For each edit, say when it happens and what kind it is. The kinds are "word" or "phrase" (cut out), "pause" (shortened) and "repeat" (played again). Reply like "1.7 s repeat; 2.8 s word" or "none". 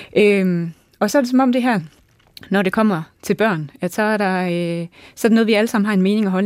none